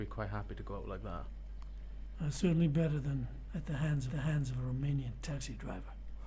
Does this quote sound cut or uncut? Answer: cut